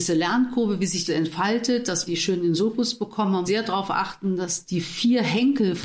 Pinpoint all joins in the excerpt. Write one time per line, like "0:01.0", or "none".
0:01.1
0:02.1
0:03.5
0:04.6